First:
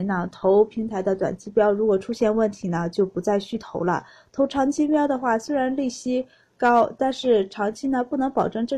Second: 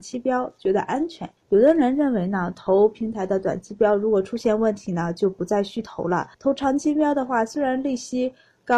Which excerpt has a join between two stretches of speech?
second; 2 cuts; at 1.4 s, 6.3 s

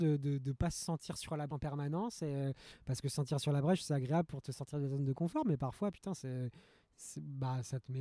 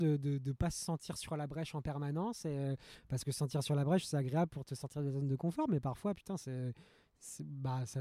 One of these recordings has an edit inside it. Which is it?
first; 1 cut; at 1.5 s

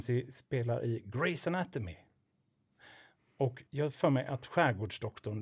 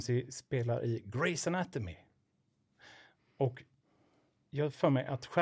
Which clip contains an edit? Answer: first; 1 cut; at 3.7 s

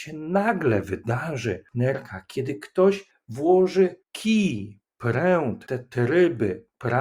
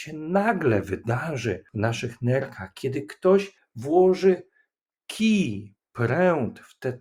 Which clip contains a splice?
first; 3 cuts; at 1.7 s, 4.0 s, 5.7 s

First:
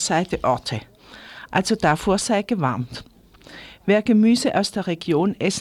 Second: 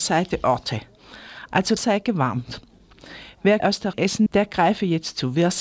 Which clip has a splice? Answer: second; 4 cuts; at 1.8 s, 3.6 s, 3.9 s, 4.3 s

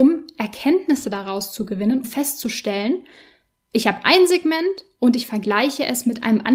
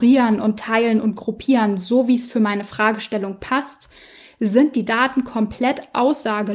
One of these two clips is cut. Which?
first; 1 cut; at 2.0 s

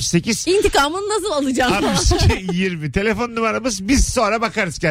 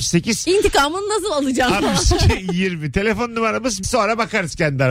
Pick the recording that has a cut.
second; 1 cut; at 3.8 s

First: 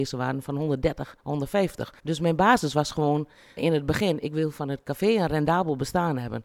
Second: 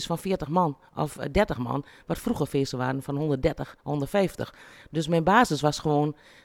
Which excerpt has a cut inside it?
first; 2 cuts; at 2.0 s, 3.6 s

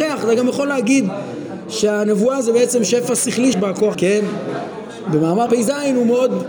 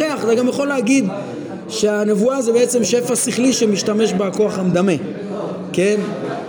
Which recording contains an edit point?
first; 3 cuts; at 3.5 s, 3.9 s, 5.5 s

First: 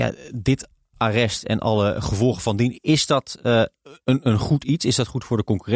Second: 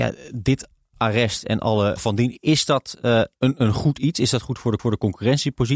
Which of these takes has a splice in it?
second; 3 cuts; at 2.0 s, 3.3 s, 4.8 s

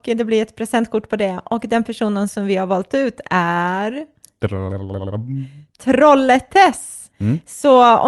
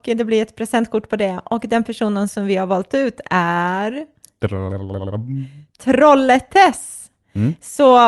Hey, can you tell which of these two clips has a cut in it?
first; 1 cut; at 7.1 s

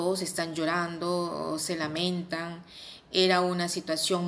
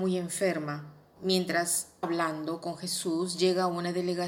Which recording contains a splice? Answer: second; 2 cuts; at 1.2 s, 2.0 s

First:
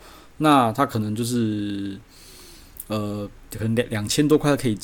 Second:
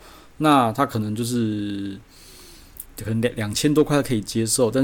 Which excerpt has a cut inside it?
second; 1 cut; at 2.9 s

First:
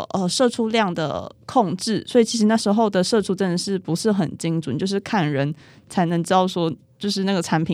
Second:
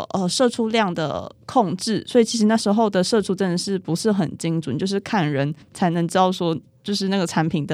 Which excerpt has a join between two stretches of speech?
second; 1 cut; at 5.6 s

